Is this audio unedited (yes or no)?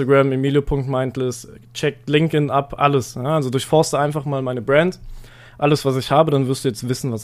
yes